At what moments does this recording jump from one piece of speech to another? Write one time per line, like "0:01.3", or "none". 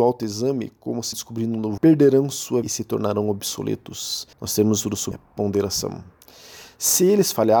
0:01.1
0:01.8
0:02.6
0:04.3
0:05.1